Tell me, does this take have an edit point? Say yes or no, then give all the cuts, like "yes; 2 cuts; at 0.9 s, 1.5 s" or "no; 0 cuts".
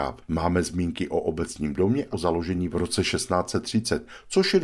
yes; 2 cuts; at 2.1 s, 2.7 s